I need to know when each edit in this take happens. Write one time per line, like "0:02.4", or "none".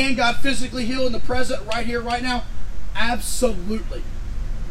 none